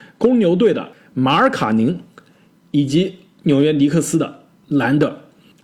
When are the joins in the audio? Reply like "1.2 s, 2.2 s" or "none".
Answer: none